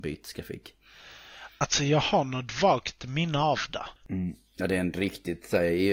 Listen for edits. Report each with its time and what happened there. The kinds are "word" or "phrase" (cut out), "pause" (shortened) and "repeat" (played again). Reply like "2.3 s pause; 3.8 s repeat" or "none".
4.5 s pause